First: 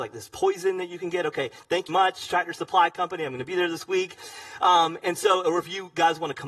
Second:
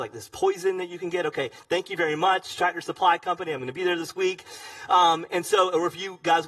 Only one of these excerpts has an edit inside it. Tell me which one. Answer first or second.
first